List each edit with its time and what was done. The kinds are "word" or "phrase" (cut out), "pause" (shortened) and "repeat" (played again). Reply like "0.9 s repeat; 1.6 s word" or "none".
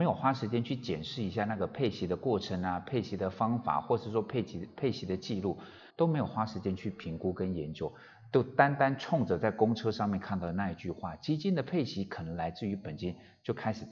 5.9 s pause

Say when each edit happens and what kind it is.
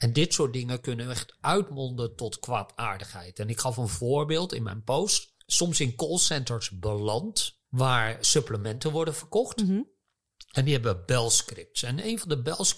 7.6 s pause

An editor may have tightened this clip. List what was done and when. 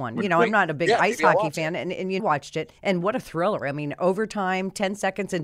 2.2 s phrase; 2.8 s pause

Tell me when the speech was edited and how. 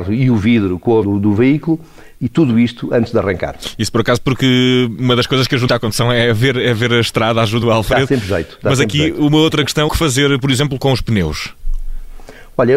1.0 s word; 2.1 s pause; 5.7 s word; 7.6 s word; 9.9 s word; 10.8 s word

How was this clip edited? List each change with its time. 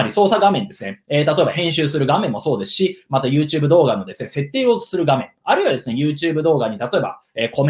none

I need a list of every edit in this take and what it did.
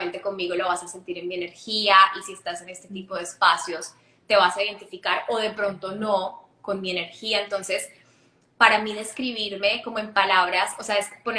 none

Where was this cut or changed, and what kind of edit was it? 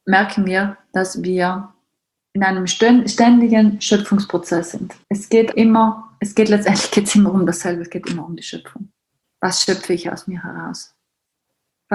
2.2 s pause; 5.0 s pause; 5.5 s word; 9.1 s pause

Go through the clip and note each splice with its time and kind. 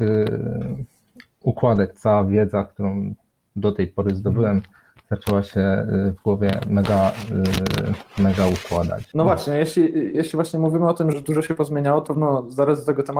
10.1 s word; 11.1 s word; 12.1 s word

